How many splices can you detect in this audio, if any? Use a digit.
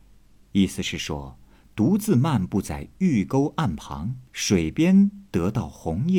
1